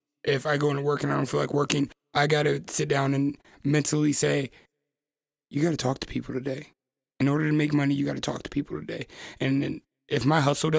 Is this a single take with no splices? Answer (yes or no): yes